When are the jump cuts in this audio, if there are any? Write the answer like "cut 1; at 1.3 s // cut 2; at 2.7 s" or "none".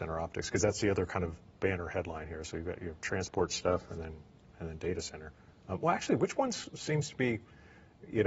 none